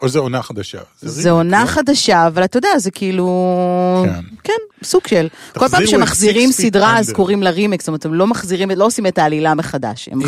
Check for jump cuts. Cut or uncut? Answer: cut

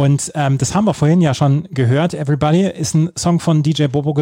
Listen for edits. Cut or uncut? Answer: uncut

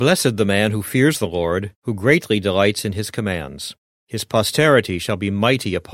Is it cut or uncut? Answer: cut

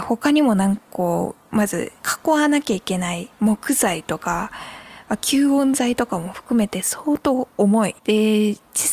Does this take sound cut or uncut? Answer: cut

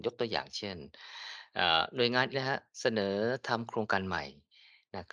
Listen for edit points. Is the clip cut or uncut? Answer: cut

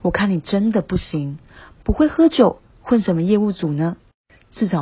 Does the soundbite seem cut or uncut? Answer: uncut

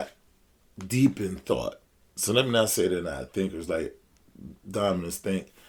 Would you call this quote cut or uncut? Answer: uncut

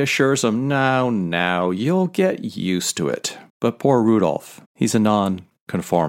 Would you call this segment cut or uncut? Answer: cut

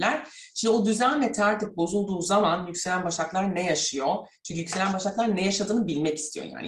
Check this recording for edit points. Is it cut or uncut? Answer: uncut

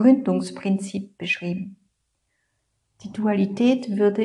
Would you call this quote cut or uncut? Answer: uncut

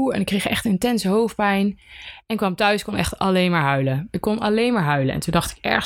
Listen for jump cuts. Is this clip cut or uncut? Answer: uncut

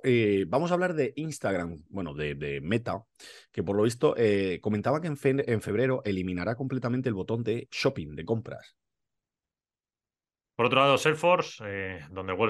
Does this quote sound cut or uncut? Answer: uncut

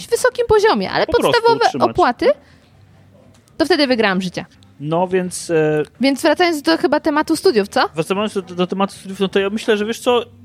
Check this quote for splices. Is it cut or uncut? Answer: cut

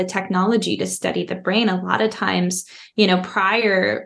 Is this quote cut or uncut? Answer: uncut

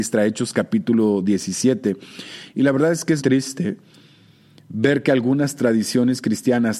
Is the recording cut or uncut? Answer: cut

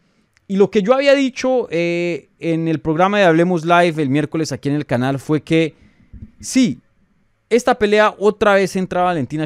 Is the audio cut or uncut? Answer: uncut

